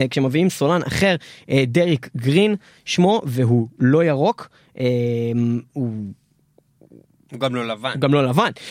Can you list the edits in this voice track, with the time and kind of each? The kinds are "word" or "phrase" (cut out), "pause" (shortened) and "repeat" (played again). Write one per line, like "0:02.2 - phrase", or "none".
none